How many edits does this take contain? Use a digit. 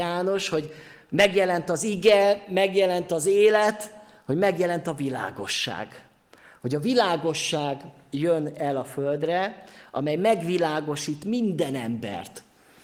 0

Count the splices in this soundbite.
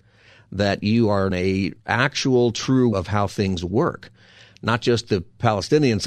3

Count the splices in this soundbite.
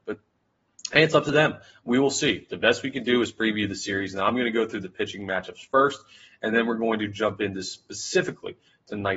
0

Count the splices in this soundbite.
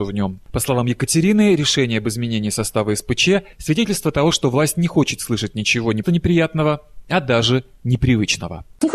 1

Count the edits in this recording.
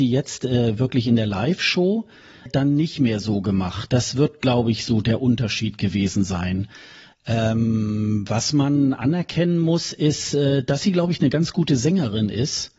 1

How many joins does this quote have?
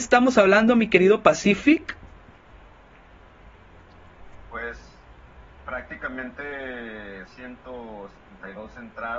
2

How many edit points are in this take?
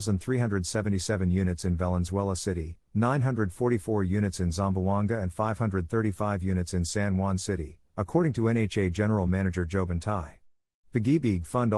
0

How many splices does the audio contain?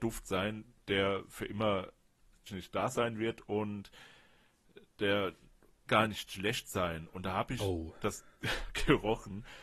3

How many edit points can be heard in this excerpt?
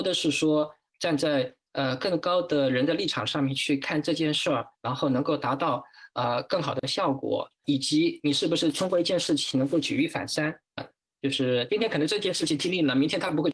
3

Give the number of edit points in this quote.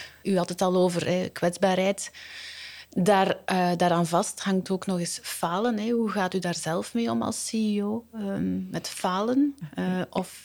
0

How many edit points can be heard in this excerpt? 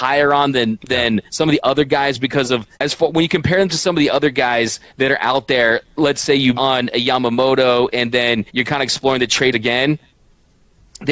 6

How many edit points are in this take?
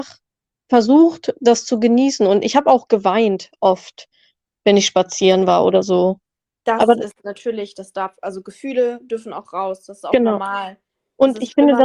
0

